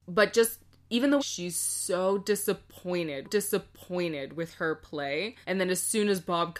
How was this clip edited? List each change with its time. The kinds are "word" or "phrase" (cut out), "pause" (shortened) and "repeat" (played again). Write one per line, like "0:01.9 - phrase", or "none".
0:01.2 - phrase
0:03.2 - repeat
0:05.4 - pause